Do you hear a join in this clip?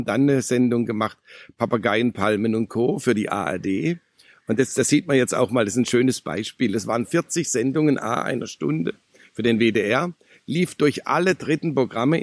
no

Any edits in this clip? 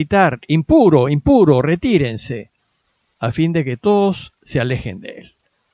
no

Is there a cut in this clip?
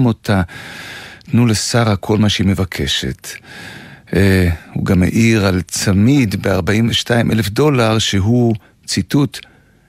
no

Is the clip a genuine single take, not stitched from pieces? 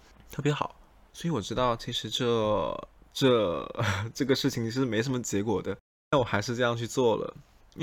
no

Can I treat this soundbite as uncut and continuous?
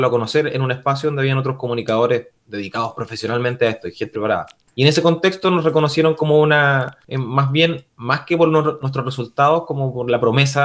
no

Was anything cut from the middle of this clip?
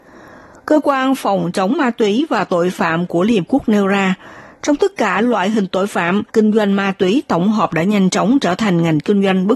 yes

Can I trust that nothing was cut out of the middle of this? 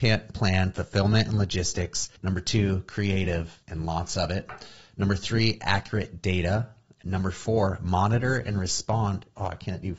no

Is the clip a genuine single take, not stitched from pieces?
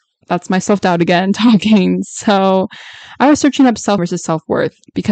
no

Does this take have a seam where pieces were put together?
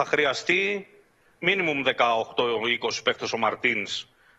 no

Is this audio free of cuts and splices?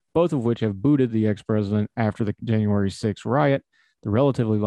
yes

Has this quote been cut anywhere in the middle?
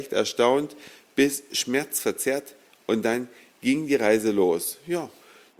no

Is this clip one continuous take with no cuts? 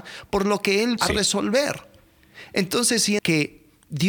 no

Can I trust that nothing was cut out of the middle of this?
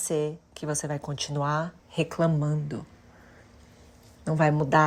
no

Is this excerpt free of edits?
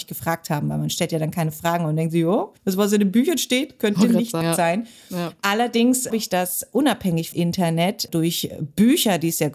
no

